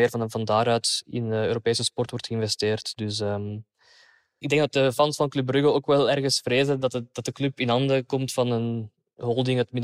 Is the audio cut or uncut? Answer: uncut